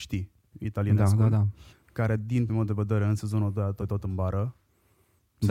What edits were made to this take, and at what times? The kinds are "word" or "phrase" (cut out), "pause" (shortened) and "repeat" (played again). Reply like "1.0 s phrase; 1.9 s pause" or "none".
1.7 s pause; 2.5 s word; 3.8 s word